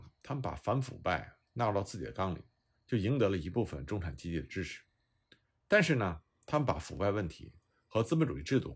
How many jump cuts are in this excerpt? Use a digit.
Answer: 0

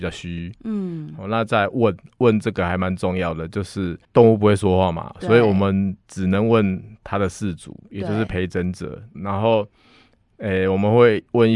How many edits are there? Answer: 3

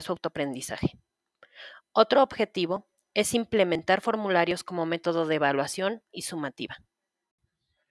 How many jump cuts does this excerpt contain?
1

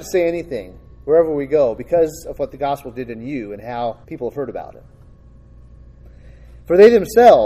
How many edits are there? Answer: 1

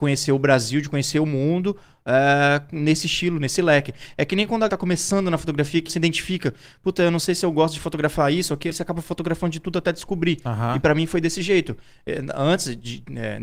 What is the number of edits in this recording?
3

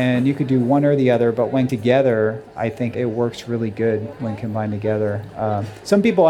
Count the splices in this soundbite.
2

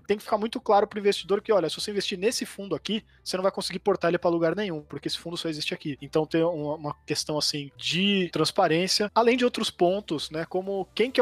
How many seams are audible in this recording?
0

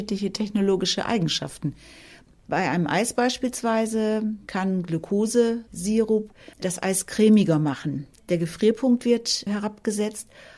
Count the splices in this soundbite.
2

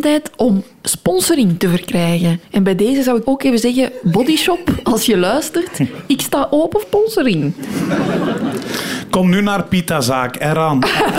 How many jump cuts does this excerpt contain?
3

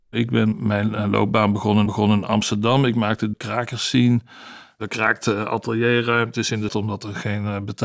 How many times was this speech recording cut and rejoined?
3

